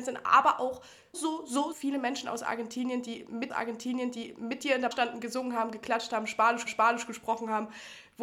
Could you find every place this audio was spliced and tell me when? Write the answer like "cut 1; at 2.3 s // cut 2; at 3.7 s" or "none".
cut 1; at 1.1 s // cut 2; at 1.7 s // cut 3; at 3.5 s // cut 4; at 4.9 s // cut 5; at 6.7 s